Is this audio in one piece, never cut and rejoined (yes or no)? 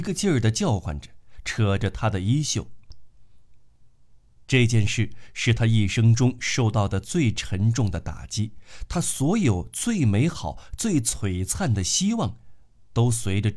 yes